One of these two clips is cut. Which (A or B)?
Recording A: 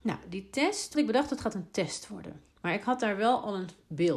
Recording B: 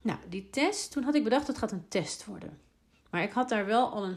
A